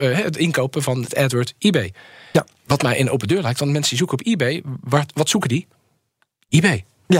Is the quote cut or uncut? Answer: uncut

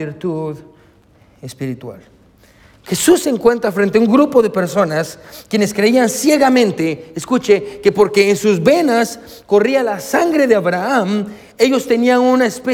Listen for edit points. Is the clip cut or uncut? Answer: uncut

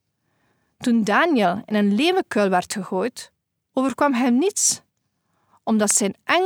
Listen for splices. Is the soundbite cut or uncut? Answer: uncut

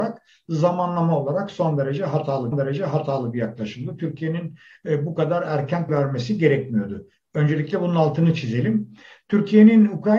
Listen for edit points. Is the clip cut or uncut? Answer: cut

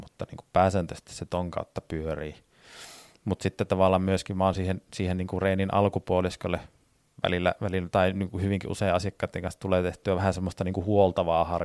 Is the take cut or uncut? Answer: uncut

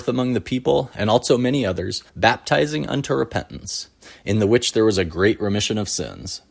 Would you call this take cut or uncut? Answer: cut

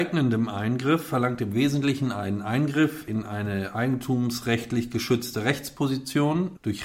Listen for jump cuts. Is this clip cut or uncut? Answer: uncut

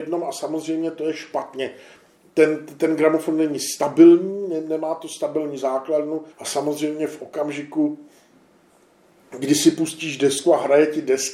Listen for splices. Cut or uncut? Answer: cut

